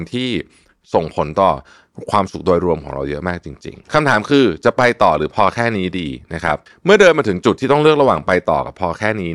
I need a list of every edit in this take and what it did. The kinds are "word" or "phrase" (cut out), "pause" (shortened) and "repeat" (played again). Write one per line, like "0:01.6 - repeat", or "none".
0:03.8 - pause
0:06.7 - pause